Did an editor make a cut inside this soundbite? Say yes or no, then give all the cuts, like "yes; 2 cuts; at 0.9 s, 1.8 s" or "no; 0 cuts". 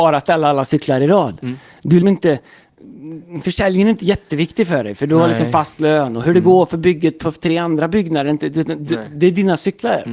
yes; 1 cut; at 2.0 s